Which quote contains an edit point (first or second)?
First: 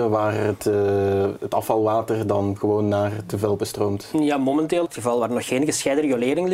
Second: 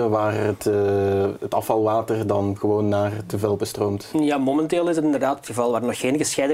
first